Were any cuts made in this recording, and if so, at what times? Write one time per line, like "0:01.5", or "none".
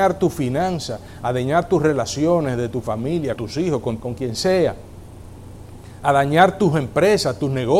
0:03.4
0:04.0